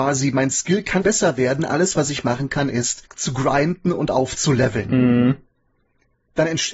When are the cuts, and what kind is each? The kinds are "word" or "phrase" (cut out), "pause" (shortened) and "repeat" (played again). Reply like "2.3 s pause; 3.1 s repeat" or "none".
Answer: 1.0 s word; 3.1 s pause